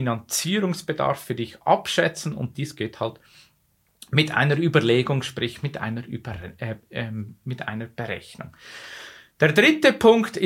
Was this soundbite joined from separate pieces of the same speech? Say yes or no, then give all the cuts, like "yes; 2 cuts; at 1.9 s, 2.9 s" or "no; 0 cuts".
no; 0 cuts